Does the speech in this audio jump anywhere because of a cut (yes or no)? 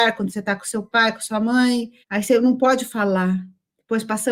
yes